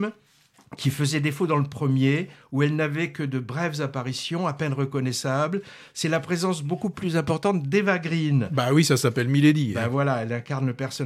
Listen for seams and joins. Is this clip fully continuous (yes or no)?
yes